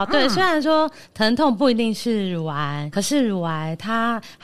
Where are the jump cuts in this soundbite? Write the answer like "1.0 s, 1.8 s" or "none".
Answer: 2.9 s